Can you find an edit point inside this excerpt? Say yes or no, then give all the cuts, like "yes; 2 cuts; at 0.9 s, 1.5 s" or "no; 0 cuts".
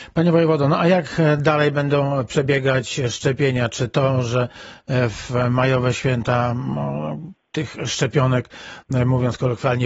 no; 0 cuts